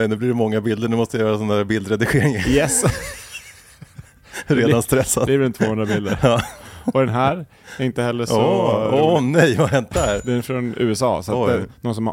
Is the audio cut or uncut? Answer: uncut